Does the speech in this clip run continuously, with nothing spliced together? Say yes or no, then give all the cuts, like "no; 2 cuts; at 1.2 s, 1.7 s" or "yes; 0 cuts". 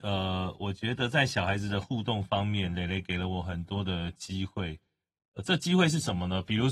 yes; 0 cuts